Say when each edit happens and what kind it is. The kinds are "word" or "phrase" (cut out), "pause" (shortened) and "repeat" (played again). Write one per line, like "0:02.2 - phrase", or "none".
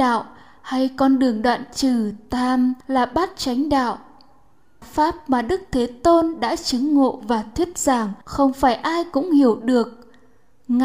0:02.8 - pause
0:04.8 - phrase
0:08.2 - pause